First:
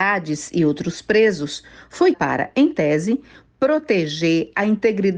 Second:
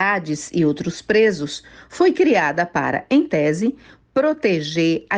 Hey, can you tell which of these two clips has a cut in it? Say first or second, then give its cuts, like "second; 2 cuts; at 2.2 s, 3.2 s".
first; 1 cut; at 2.1 s